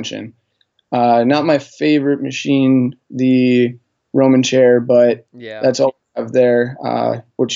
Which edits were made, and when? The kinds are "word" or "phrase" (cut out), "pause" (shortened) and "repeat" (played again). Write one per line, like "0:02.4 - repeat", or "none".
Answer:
none